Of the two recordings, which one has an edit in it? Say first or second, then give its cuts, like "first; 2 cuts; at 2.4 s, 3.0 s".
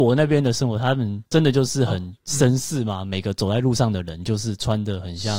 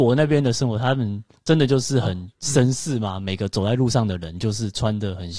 first; 1 cut; at 1.2 s